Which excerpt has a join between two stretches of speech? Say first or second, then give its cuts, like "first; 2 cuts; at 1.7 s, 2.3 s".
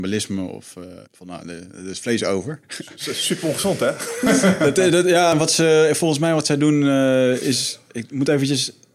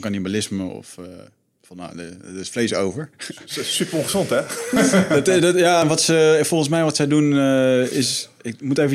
first; 1 cut; at 1.1 s